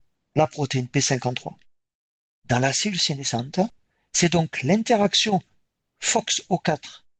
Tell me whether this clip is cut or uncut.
uncut